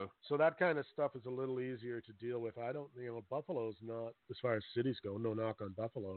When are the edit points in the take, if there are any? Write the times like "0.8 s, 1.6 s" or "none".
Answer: none